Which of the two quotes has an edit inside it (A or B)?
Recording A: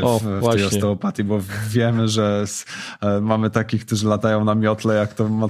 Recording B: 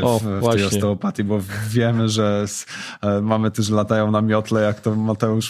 B